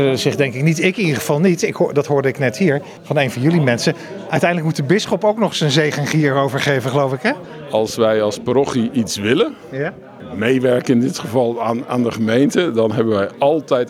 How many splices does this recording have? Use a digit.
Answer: 0